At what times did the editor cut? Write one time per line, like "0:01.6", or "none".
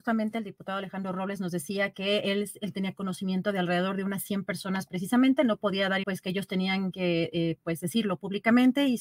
0:06.0